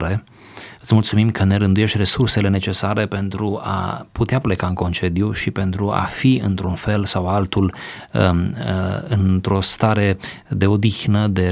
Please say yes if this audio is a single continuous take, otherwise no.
yes